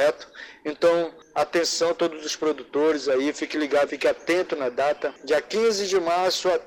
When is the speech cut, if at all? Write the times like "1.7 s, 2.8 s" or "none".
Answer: 3.9 s